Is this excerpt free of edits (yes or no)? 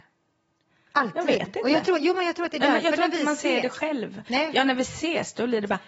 yes